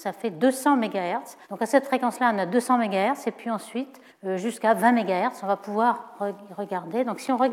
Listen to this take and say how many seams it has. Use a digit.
2